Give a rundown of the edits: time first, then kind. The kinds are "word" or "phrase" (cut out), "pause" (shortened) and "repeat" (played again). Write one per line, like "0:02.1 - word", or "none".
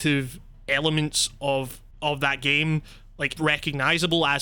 0:01.9 - pause
0:03.4 - phrase